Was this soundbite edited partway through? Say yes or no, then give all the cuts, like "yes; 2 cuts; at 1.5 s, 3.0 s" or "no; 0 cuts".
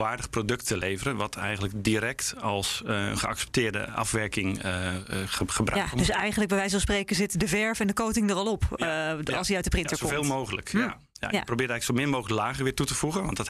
no; 0 cuts